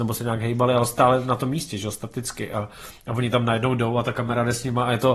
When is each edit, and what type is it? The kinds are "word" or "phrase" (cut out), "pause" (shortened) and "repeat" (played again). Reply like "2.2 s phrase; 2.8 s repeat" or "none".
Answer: none